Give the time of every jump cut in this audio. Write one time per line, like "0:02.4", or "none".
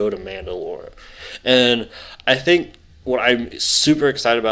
none